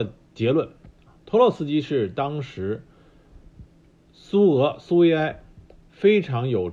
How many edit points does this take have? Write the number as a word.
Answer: zero